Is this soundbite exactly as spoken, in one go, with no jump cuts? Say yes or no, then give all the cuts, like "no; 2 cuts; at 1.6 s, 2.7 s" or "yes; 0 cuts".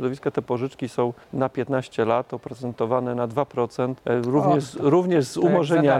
no; 2 cuts; at 1.2 s, 4.0 s